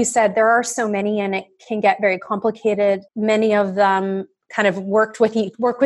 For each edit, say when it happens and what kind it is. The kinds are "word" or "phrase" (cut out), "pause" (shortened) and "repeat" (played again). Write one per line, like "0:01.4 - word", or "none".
0:03.1 - pause